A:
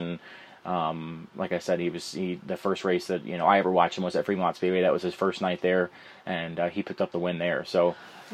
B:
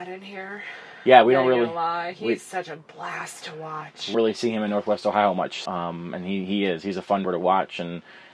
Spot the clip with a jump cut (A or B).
B